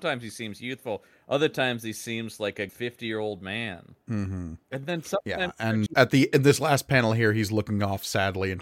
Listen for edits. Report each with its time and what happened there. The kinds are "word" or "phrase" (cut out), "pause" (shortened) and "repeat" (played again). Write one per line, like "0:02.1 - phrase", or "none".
0:02.7 - word
0:04.0 - pause
0:05.9 - word